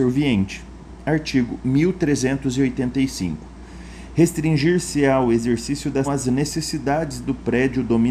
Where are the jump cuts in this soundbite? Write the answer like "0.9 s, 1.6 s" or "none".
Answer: 6.0 s